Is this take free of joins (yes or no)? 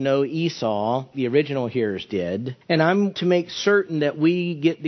no